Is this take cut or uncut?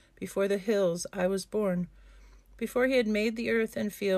uncut